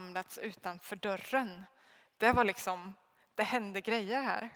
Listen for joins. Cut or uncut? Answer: uncut